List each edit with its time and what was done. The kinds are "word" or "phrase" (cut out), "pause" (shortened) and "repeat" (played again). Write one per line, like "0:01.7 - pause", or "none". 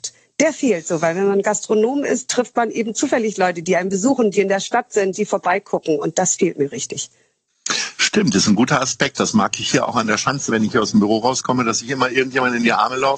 0:10.5 - phrase